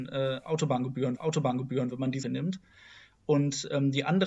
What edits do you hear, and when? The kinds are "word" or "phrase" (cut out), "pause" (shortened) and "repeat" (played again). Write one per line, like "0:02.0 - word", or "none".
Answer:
0:01.2 - repeat
0:02.2 - word